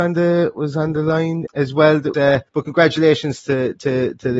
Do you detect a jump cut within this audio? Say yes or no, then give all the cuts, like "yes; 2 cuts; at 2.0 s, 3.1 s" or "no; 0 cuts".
yes; 3 cuts; at 1.5 s, 2.1 s, 2.5 s